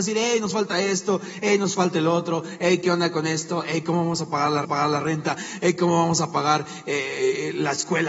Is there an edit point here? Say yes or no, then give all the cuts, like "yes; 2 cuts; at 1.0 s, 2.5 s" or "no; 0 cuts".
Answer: yes; 1 cut; at 4.6 s